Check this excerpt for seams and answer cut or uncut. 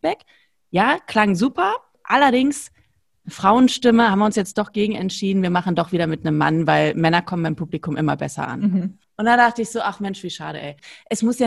uncut